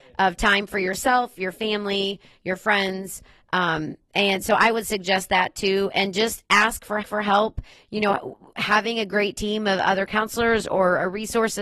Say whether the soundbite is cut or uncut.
cut